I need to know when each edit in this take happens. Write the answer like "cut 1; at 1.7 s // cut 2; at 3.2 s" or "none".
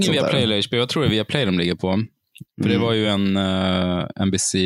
none